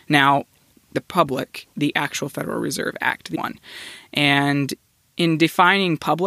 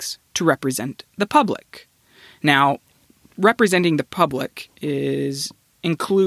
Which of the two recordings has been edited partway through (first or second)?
first